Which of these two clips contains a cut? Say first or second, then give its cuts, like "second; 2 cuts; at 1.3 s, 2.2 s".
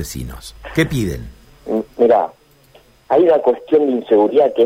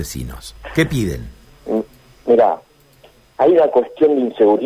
first; 1 cut; at 1.9 s